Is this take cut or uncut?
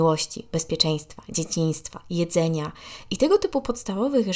uncut